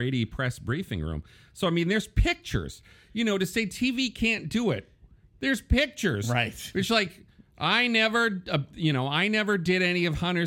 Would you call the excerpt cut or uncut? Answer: uncut